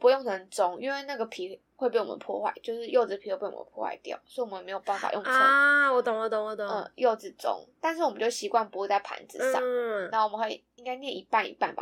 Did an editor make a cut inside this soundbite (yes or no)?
no